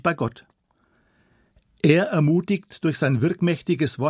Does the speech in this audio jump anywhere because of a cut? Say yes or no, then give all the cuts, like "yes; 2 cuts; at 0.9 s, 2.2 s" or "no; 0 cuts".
no; 0 cuts